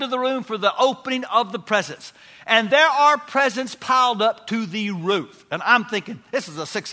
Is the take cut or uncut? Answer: uncut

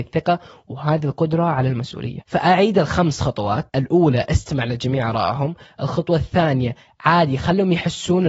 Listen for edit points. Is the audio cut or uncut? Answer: uncut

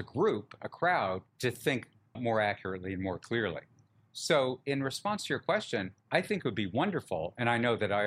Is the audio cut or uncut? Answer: cut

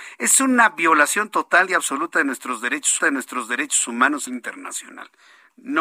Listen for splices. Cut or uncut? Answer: cut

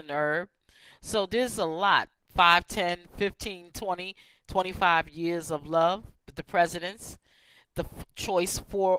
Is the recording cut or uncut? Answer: uncut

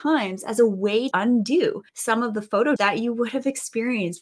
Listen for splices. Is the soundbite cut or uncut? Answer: cut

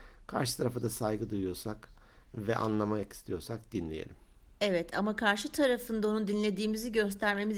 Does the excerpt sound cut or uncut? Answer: uncut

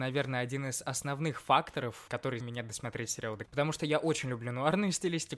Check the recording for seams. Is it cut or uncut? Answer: cut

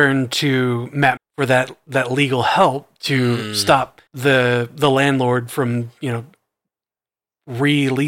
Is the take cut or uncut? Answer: cut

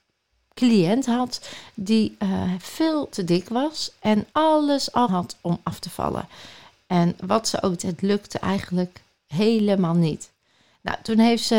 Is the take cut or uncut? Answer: cut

